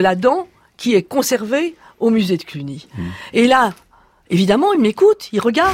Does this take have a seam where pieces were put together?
no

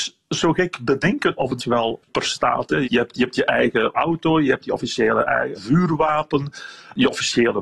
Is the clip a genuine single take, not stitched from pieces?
no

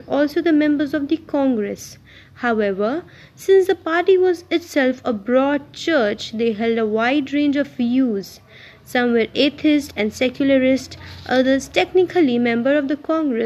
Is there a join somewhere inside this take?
no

